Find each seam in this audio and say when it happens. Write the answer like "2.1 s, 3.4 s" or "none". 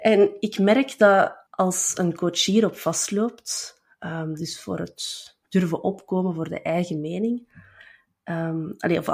1.5 s